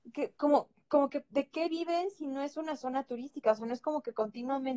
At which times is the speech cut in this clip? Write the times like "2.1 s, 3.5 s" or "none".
none